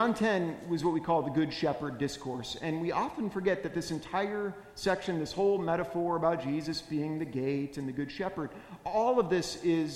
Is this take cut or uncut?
uncut